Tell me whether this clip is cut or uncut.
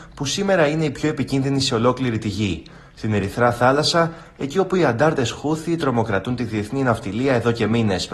uncut